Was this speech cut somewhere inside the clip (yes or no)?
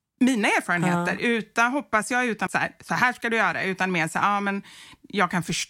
yes